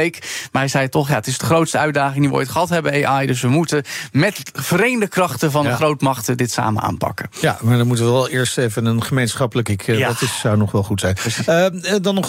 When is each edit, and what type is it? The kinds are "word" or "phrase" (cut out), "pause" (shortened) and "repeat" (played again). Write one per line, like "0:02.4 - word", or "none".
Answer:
0:09.7 - phrase